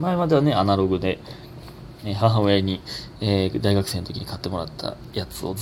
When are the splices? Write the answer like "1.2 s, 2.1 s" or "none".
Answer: none